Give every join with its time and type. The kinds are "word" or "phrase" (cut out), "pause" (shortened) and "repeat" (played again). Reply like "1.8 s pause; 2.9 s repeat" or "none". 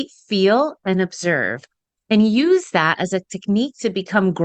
none